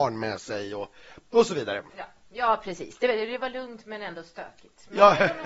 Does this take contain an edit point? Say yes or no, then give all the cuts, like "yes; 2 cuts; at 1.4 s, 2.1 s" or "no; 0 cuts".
no; 0 cuts